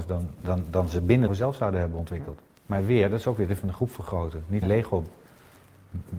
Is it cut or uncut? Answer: cut